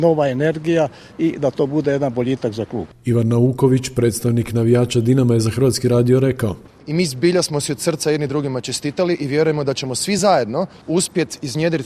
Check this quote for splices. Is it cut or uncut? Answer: uncut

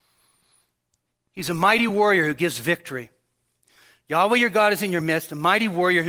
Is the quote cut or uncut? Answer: uncut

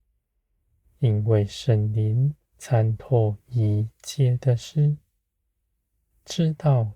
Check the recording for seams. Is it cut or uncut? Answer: cut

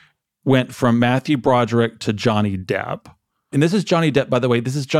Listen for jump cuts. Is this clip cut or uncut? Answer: uncut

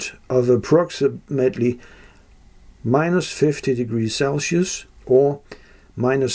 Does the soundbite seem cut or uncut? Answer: uncut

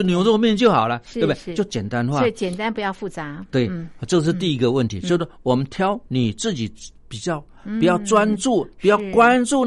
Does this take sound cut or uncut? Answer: cut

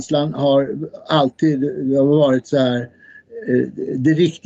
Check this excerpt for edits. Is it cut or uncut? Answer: uncut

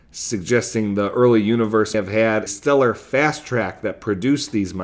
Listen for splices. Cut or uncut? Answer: cut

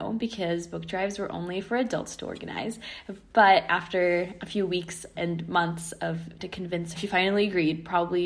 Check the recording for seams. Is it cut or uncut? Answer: cut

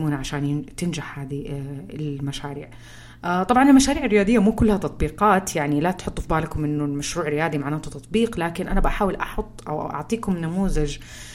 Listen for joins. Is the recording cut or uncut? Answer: uncut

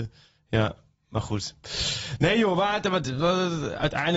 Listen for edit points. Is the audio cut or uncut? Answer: uncut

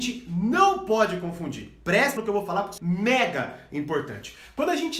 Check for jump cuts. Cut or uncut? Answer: cut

